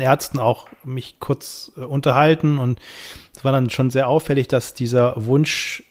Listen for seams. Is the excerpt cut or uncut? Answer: uncut